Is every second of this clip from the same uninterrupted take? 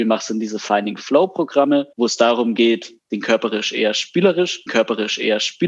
no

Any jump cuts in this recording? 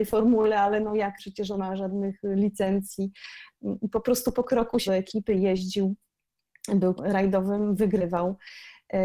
yes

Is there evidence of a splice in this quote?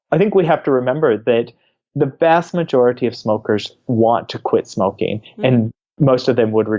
no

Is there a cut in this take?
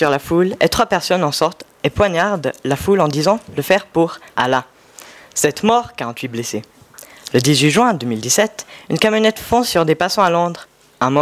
yes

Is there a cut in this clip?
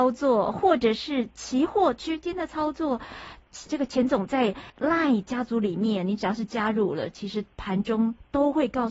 yes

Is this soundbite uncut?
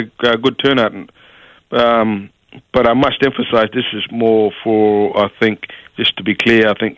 yes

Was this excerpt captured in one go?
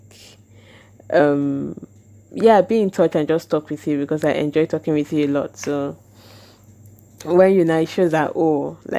yes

